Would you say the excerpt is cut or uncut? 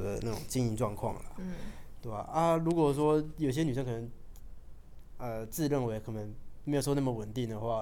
uncut